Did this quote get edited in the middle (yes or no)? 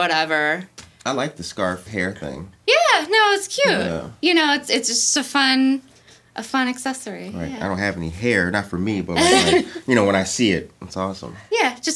yes